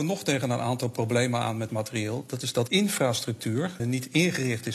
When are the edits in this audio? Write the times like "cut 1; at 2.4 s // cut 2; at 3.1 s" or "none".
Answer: cut 1; at 1.7 s // cut 2; at 2.7 s // cut 3; at 3.8 s